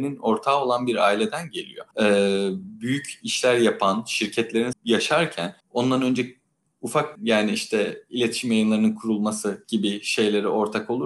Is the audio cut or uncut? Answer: cut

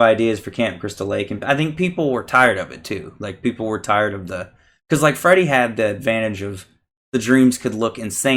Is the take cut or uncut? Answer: uncut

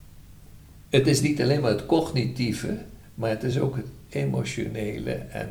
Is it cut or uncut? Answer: uncut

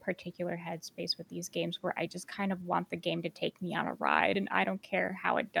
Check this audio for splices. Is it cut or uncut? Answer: uncut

